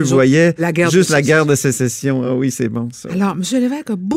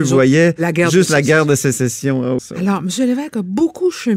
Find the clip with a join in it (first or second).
second